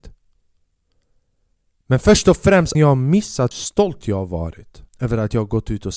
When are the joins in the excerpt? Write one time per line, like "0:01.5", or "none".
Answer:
0:02.7
0:03.5
0:04.9